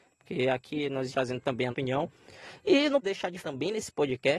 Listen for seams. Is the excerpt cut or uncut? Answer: cut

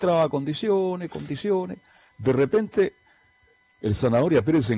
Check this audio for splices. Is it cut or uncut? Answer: uncut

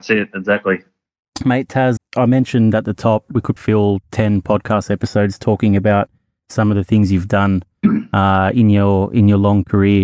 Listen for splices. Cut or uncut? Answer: cut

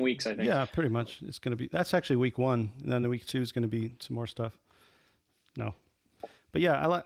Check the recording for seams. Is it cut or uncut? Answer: uncut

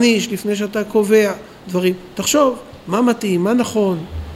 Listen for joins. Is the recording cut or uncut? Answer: uncut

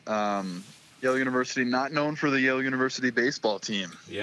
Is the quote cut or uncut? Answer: uncut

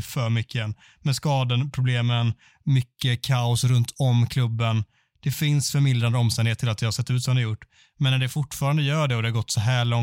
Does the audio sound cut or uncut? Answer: uncut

